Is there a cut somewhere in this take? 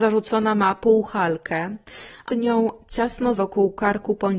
yes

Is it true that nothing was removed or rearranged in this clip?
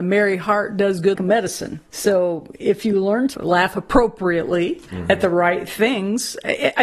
no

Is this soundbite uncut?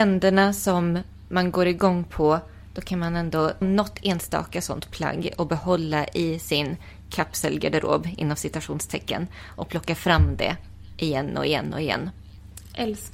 no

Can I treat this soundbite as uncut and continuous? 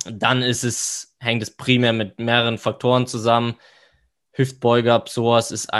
yes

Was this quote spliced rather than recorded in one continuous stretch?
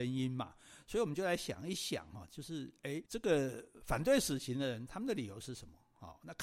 yes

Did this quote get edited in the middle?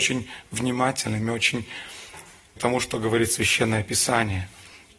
yes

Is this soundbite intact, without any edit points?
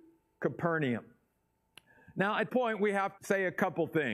no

